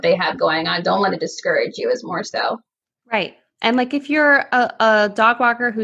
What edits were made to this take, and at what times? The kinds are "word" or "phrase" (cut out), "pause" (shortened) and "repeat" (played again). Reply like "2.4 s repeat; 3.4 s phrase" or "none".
none